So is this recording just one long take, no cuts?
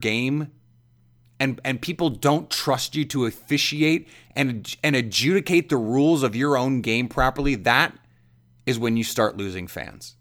yes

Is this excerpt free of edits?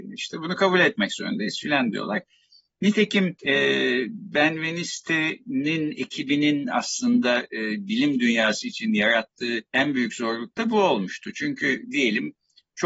no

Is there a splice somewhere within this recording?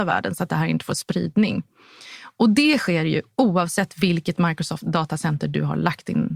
no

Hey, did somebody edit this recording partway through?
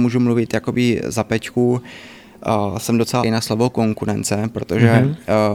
yes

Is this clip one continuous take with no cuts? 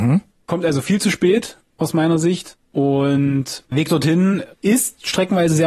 no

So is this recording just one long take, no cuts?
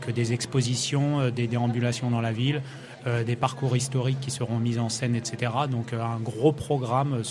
yes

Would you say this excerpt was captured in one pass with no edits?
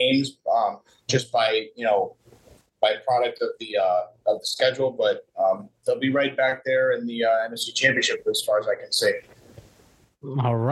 yes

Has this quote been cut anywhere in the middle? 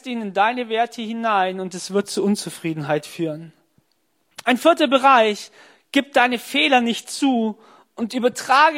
no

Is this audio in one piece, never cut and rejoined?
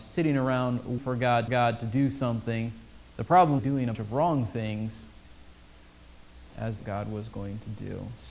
no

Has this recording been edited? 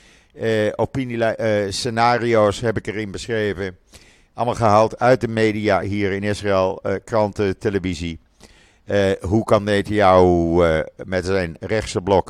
no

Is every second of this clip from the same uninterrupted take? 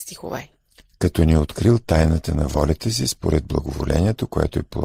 yes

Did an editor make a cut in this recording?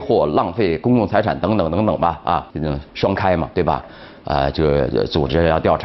yes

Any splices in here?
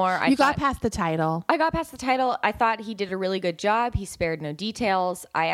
no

